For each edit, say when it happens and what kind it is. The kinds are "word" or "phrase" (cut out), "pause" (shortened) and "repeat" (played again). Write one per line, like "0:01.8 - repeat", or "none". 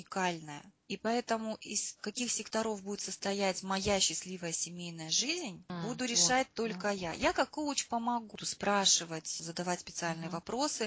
none